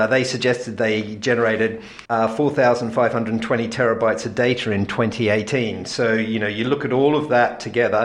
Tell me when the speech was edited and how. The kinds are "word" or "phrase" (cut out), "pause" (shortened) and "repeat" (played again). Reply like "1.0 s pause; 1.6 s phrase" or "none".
2.0 s pause